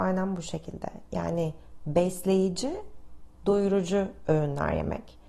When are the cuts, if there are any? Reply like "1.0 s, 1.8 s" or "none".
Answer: none